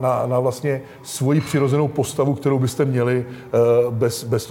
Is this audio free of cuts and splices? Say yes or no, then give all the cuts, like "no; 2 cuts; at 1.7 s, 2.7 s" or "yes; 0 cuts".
yes; 0 cuts